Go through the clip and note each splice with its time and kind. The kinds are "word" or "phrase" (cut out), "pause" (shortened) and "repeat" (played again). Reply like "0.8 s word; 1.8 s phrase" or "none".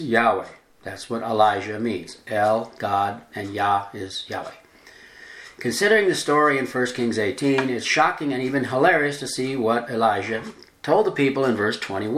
none